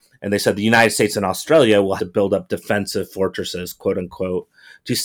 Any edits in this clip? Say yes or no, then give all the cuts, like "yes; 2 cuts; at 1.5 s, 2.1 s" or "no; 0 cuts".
yes; 1 cut; at 2.0 s